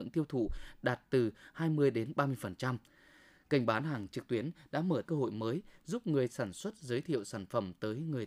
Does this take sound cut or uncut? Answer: cut